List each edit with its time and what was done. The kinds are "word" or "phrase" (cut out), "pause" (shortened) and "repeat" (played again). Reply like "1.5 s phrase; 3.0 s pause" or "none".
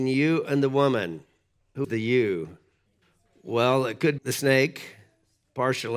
1.8 s word; 2.9 s pause; 4.2 s word